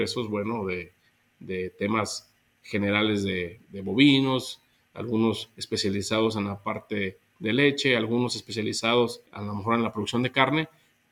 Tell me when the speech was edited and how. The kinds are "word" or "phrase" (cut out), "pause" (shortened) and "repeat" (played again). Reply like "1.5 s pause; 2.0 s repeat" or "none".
3.6 s word